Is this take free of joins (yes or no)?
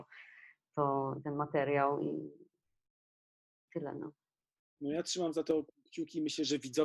no